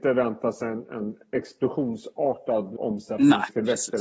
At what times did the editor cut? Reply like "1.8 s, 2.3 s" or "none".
2.8 s